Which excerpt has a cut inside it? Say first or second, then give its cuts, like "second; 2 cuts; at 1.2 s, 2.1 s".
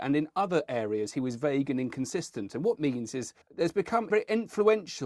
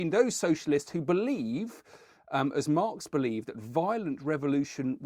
first; 3 cuts; at 2.8 s, 3.4 s, 4.1 s